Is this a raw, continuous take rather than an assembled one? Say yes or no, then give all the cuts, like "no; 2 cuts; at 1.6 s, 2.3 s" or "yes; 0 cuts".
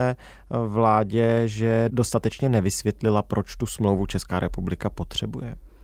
yes; 0 cuts